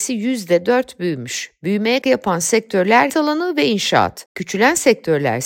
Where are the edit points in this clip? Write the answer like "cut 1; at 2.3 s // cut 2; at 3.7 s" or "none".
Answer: cut 1; at 2.0 s // cut 2; at 3.1 s